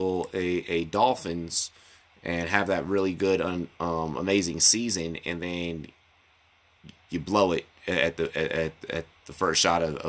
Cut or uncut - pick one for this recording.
uncut